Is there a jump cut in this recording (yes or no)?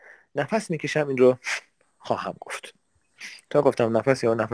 no